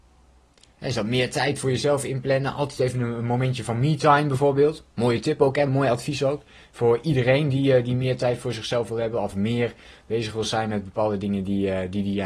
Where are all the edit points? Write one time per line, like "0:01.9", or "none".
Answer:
none